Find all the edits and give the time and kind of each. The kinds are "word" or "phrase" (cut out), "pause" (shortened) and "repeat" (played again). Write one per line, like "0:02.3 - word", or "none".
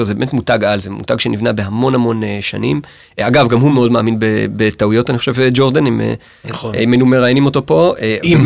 none